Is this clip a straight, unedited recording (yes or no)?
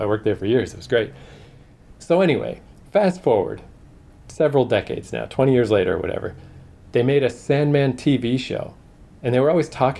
yes